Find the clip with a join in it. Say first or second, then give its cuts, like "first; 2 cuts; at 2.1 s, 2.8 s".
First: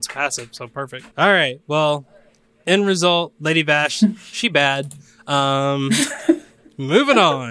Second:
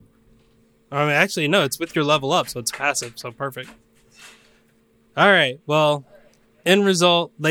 first; 1 cut; at 1.1 s